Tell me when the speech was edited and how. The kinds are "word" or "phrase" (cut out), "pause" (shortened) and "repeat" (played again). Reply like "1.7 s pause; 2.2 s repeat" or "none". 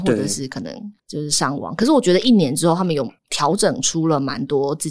1.0 s pause; 3.2 s pause